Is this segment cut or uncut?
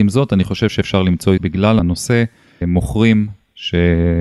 cut